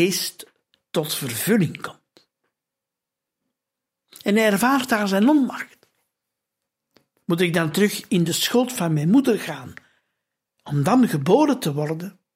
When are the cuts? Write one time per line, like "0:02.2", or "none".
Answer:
none